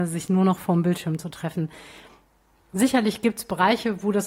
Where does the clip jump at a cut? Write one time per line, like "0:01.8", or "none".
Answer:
none